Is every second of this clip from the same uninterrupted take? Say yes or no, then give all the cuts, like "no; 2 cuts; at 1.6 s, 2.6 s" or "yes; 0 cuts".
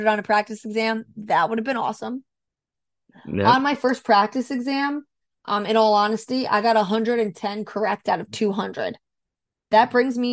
yes; 0 cuts